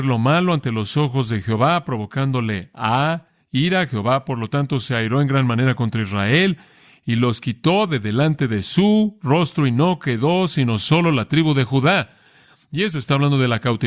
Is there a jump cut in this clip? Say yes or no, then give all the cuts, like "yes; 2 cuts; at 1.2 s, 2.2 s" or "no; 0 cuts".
no; 0 cuts